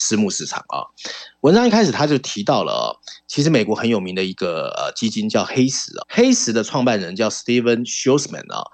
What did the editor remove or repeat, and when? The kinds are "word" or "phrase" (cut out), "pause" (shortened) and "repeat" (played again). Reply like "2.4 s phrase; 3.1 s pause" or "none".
6.0 s word